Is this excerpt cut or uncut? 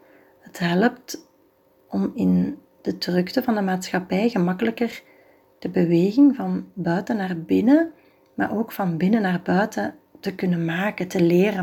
uncut